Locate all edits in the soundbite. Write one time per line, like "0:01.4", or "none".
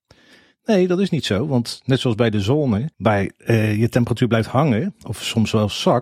0:02.9